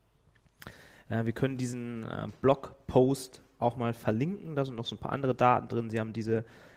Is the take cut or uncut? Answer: uncut